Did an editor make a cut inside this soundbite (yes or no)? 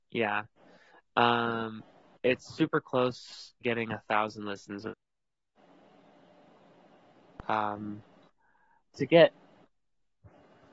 yes